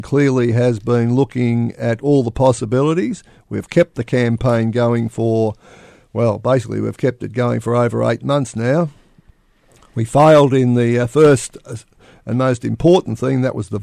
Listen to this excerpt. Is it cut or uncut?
uncut